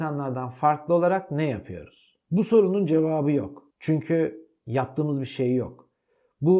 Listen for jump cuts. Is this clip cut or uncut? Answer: cut